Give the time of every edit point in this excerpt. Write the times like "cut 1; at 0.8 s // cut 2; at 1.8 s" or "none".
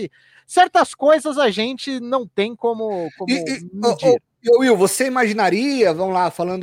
cut 1; at 4.3 s